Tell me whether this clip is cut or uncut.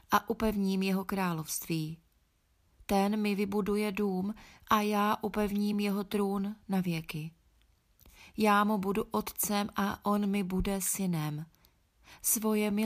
uncut